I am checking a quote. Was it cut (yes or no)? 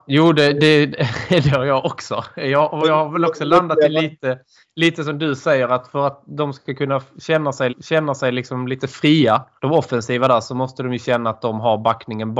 yes